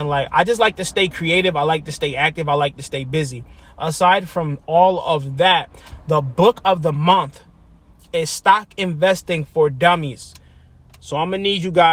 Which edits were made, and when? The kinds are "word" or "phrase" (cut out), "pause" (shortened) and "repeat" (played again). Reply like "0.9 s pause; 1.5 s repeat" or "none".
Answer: none